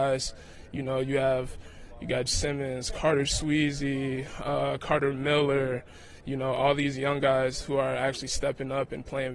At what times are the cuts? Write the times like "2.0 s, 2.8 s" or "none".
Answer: 2.3 s